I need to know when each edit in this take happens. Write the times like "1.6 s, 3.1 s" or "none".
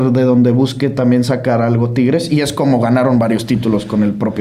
none